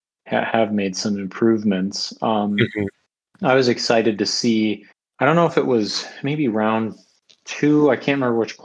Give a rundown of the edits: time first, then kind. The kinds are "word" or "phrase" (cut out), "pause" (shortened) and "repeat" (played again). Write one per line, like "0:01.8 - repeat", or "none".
0:04.9 - pause